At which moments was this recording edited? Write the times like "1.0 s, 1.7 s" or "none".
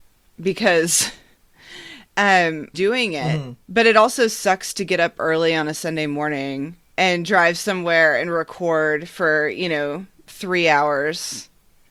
2.7 s, 3.6 s, 6.8 s